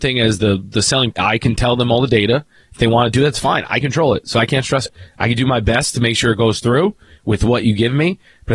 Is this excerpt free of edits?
no; 3 cuts; at 1.1 s, 3.8 s, 4.9 s

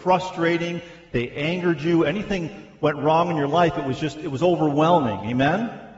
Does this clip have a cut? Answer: no; 0 cuts

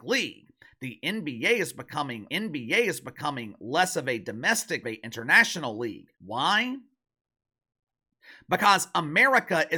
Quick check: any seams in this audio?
yes; 3 cuts; at 2.3 s, 4.8 s, 6.1 s

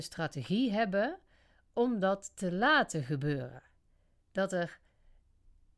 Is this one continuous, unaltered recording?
yes; 0 cuts

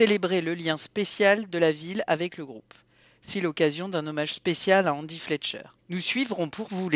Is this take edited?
yes; 2 cuts; at 3.3 s, 5.8 s

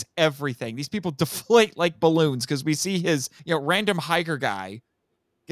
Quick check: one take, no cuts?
no; 1 cut; at 3.4 s

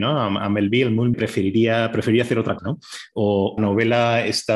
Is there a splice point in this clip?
yes; 3 cuts; at 1.1 s, 2.6 s, 3.6 s

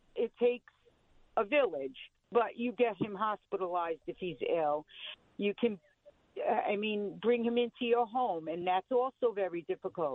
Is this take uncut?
yes; 0 cuts

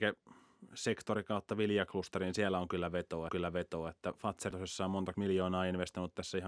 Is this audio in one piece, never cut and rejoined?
no; 3 cuts; at 3.3 s, 4.5 s, 5.1 s

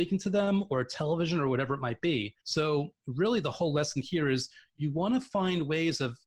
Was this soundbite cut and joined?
yes; 1 cut; at 2.4 s

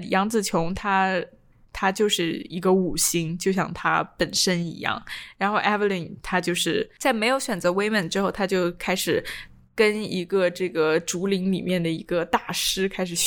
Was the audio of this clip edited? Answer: no; 0 cuts

